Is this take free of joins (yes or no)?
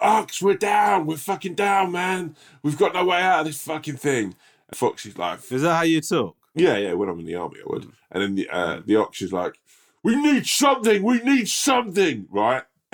no